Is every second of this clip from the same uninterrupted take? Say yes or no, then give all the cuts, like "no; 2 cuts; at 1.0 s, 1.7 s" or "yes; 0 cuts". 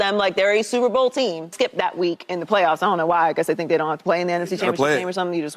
no; 1 cut; at 1.5 s